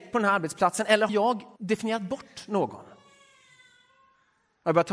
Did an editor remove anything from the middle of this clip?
yes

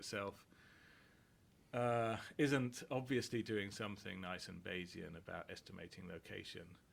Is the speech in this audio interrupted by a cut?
no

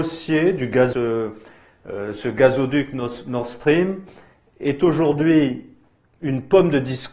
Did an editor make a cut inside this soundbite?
yes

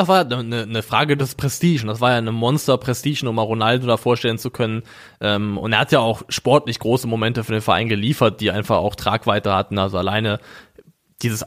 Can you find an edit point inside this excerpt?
no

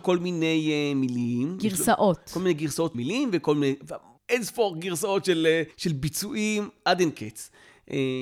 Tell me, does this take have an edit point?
yes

